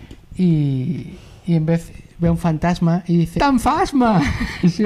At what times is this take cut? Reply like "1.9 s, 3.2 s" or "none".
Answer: 2.1 s, 3.4 s